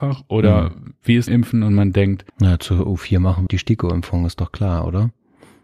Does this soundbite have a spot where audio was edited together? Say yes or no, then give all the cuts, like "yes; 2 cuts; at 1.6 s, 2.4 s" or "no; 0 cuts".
yes; 3 cuts; at 1.3 s, 2.3 s, 3.5 s